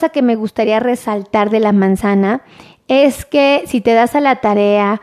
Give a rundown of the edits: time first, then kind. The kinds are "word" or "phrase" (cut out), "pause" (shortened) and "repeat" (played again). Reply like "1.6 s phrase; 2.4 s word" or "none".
none